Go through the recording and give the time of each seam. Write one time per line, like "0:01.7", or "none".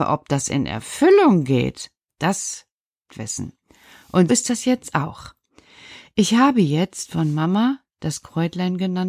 0:03.1
0:04.3